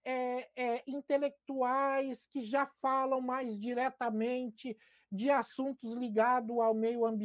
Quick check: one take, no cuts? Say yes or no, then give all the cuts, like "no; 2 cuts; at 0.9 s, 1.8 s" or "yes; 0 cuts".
yes; 0 cuts